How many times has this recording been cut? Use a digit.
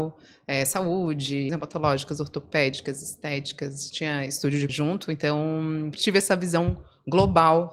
3